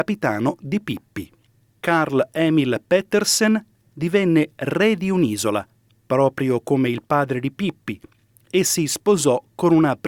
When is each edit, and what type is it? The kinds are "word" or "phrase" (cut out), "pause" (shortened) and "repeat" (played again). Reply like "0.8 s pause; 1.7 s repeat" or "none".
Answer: none